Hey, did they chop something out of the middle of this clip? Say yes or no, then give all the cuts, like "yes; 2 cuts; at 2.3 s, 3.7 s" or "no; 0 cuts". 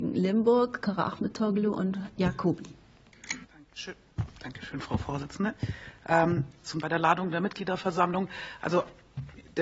yes; 2 cuts; at 3.4 s, 6.8 s